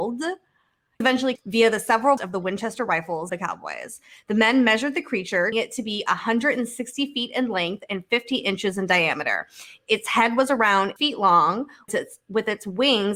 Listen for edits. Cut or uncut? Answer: cut